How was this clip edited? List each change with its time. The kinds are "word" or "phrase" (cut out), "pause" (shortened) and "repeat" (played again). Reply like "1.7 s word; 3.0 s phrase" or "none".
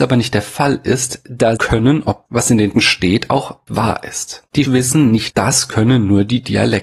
1.6 s phrase; 2.3 s word; 2.8 s word; 3.7 s word; 4.6 s phrase; 5.3 s word